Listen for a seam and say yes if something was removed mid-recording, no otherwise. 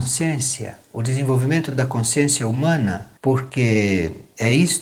yes